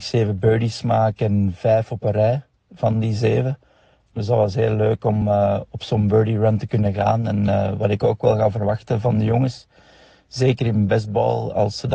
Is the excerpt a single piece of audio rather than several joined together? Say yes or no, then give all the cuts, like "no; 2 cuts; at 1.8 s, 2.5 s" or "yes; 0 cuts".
yes; 0 cuts